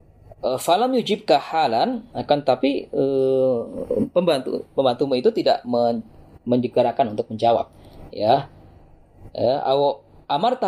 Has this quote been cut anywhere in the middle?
no; 0 cuts

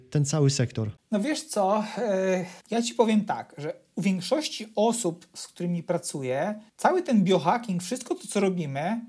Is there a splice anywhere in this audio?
yes; 3 cuts; at 1.0 s, 2.6 s, 6.7 s

